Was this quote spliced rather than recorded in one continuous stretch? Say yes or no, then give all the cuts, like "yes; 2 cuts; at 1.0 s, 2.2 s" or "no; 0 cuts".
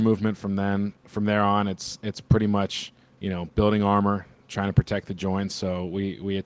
no; 0 cuts